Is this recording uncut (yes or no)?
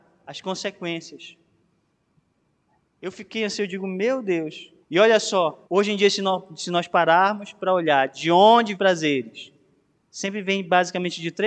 no